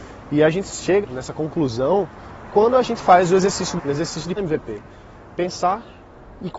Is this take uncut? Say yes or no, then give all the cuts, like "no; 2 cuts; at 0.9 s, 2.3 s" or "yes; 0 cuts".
no; 3 cuts; at 1.0 s, 3.8 s, 4.4 s